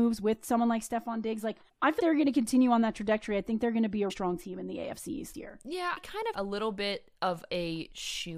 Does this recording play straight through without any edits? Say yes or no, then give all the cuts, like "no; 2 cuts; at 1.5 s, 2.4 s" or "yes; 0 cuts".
no; 6 cuts; at 1.7 s, 2.0 s, 4.1 s, 5.3 s, 6.0 s, 6.3 s